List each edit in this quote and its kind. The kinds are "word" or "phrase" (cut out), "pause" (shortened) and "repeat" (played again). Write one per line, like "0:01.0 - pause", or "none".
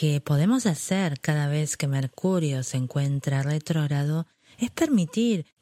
none